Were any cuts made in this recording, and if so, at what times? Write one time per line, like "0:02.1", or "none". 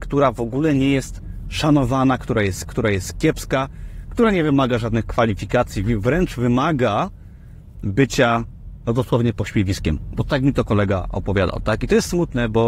0:02.7